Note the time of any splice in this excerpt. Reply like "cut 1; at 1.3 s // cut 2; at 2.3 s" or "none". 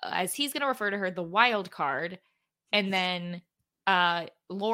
none